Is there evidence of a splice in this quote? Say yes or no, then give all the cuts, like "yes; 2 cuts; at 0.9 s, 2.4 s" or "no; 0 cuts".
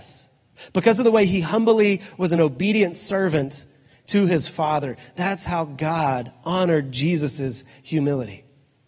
no; 0 cuts